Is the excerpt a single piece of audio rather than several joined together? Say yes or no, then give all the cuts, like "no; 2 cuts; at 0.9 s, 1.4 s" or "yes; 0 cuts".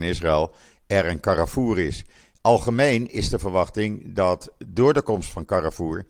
yes; 0 cuts